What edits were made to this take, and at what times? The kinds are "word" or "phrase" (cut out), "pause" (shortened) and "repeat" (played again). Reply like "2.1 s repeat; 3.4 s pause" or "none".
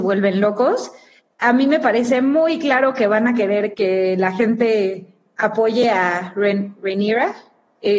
3.7 s word